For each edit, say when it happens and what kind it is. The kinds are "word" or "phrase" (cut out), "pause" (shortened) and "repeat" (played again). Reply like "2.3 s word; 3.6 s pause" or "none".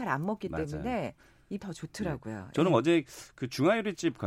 1.6 s word